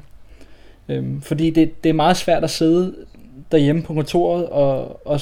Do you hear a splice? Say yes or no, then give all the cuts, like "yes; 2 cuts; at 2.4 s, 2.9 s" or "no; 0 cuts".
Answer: no; 0 cuts